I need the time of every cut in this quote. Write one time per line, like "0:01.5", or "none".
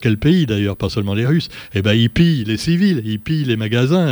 none